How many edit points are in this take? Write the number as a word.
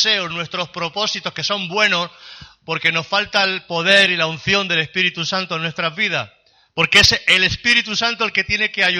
zero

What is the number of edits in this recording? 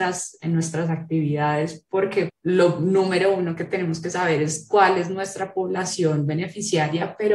one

